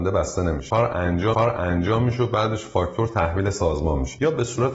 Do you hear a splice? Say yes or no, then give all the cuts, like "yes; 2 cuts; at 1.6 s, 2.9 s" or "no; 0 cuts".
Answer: yes; 1 cut; at 1.3 s